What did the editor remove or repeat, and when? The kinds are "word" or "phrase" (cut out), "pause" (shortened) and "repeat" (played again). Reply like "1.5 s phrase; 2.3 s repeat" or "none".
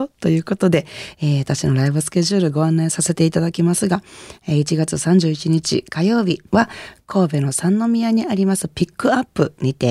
6.5 s pause